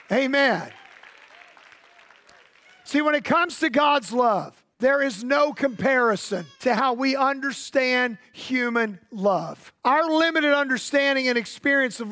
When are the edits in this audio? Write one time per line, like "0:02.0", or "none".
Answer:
0:04.7
0:06.5
0:09.8